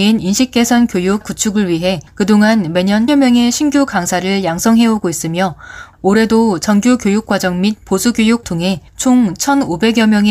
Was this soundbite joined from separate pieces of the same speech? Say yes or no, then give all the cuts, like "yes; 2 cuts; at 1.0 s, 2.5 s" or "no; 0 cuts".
yes; 5 cuts; at 1.2 s, 2.1 s, 3.1 s, 8.4 s, 8.9 s